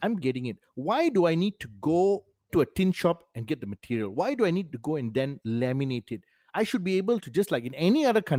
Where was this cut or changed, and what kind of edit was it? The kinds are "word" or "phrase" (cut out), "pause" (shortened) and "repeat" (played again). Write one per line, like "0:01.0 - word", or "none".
0:02.5 - word